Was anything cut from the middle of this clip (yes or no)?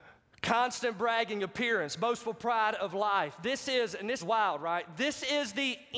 yes